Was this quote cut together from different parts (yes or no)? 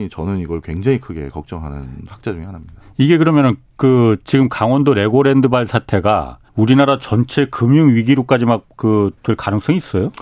yes